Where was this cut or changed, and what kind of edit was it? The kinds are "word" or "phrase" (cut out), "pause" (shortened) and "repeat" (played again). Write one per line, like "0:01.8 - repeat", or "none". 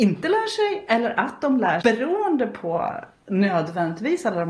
0:01.8 - phrase